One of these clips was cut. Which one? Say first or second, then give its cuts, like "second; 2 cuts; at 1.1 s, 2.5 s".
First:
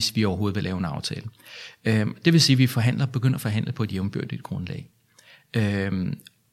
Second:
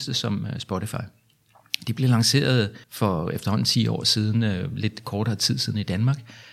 second; 1 cut; at 2.8 s